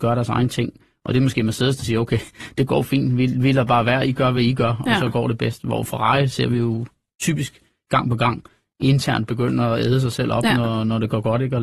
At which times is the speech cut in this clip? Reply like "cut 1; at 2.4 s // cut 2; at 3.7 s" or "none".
none

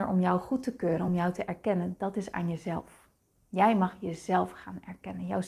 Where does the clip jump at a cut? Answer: none

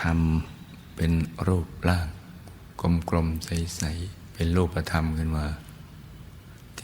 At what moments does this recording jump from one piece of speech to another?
cut 1; at 4.3 s

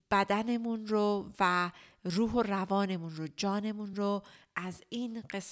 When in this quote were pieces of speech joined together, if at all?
none

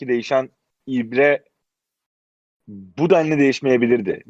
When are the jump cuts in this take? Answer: none

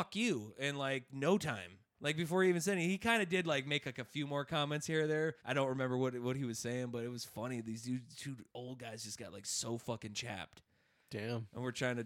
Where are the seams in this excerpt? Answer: cut 1; at 1.9 s // cut 2; at 5.4 s

